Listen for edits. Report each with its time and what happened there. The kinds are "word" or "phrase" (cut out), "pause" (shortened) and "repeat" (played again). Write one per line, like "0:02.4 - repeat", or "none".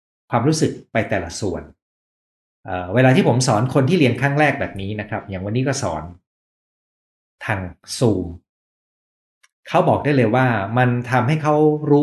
none